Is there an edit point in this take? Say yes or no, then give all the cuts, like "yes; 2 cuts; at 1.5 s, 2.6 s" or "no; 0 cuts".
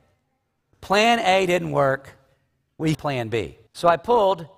yes; 2 cuts; at 2.9 s, 3.7 s